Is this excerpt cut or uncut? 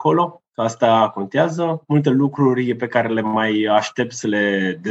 uncut